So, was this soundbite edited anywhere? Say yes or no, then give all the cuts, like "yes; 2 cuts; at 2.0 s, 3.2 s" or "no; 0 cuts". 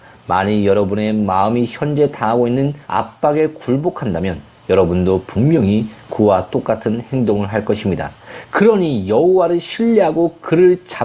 yes; 1 cut; at 2.8 s